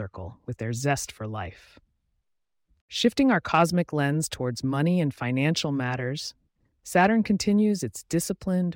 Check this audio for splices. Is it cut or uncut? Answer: uncut